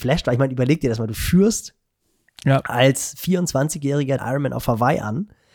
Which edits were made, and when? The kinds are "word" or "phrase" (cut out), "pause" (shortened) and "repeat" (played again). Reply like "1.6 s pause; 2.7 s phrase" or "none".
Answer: 4.2 s word